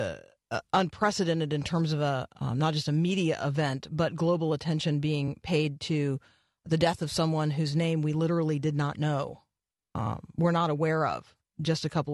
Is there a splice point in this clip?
no; 0 cuts

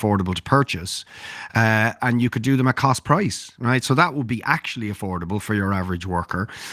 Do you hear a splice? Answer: no; 0 cuts

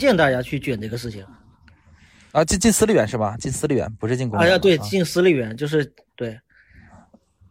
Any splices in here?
no; 0 cuts

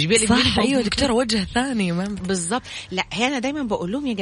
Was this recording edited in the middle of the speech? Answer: no; 0 cuts

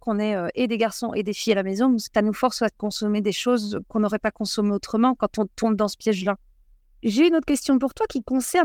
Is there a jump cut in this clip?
no; 0 cuts

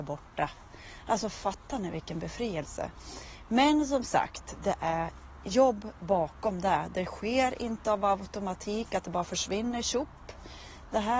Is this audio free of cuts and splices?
yes; 0 cuts

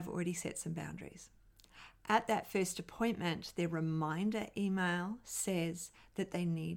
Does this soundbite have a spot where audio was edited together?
no; 0 cuts

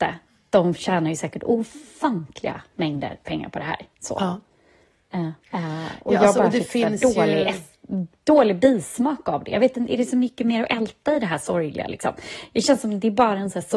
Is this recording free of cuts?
no; 2 cuts; at 3.9 s, 5.4 s

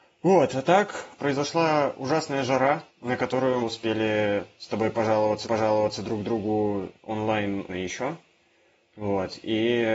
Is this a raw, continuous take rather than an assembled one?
no; 6 cuts; at 1.2 s, 2.9 s, 3.6 s, 5.4 s, 6.9 s, 7.7 s

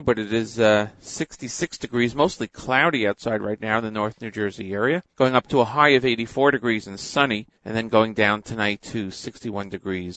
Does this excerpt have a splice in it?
yes; 2 cuts; at 5.1 s, 7.5 s

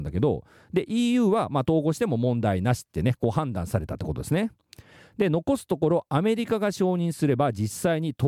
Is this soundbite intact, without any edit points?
yes; 0 cuts

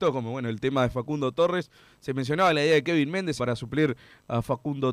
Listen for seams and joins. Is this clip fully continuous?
no; 1 cut; at 3.4 s

